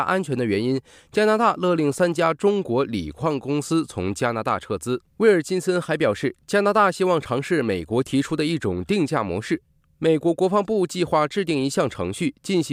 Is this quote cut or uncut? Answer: cut